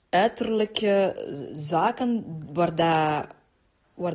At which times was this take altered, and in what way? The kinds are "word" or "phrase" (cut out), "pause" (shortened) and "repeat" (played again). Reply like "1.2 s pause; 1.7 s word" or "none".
none